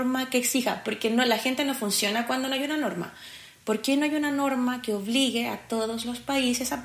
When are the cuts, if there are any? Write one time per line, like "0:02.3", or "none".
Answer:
none